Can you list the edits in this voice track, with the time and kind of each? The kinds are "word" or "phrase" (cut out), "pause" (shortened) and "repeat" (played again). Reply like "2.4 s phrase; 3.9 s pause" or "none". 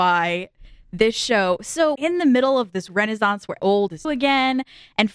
2.0 s word; 2.9 s word; 3.6 s word; 4.0 s word